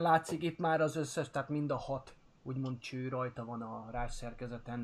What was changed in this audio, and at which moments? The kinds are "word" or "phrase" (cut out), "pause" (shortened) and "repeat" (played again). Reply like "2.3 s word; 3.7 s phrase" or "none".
none